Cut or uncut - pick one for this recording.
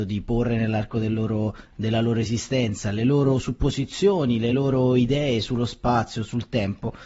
uncut